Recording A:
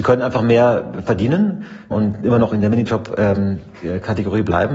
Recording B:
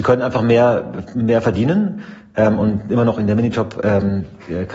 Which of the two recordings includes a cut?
A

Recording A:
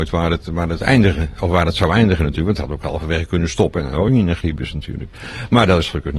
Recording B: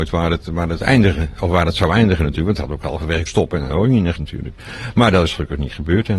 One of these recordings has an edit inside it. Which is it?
B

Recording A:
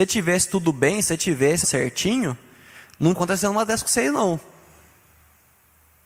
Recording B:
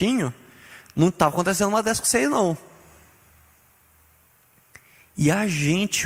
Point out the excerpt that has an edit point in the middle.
A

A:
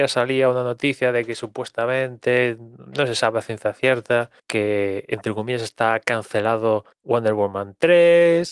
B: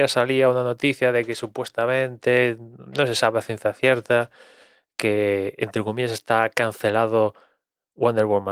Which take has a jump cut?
A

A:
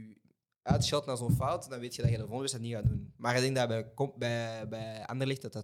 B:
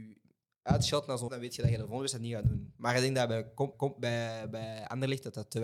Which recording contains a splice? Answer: B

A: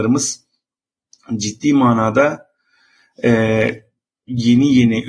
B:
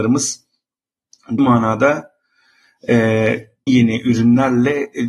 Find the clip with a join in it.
B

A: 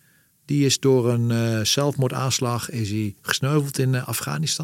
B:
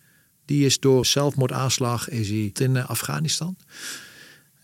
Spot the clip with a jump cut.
B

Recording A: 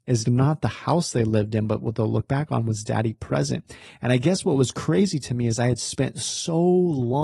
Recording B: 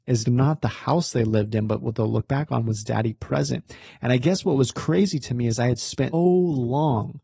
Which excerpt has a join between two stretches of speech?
B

